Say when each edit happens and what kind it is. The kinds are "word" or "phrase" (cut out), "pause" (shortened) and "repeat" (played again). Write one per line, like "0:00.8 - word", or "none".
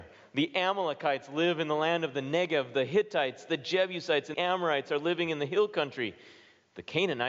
0:04.3 - word